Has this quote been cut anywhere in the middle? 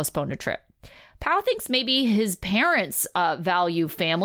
no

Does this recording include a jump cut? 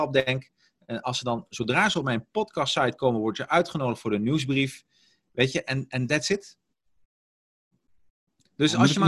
no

